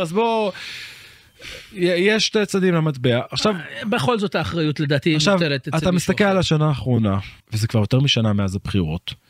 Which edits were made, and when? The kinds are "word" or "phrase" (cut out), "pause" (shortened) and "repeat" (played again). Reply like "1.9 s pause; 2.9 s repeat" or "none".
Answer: 7.4 s pause